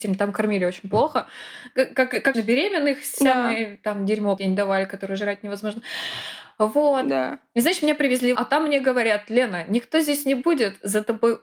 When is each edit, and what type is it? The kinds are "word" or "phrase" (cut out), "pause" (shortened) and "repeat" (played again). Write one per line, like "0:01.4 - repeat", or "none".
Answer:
0:02.3 - word
0:04.4 - phrase
0:08.4 - word